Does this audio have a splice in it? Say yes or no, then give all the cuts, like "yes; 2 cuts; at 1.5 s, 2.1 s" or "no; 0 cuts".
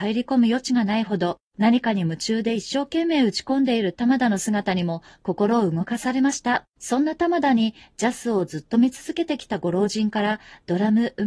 yes; 1 cut; at 6.7 s